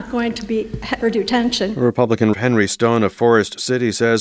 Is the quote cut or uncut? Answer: cut